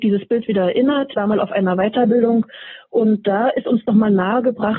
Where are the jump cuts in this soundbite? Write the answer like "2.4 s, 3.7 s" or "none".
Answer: 1.1 s